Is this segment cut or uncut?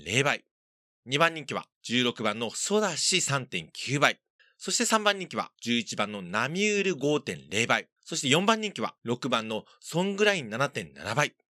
cut